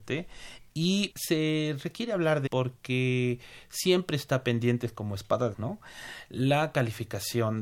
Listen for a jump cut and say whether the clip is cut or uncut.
cut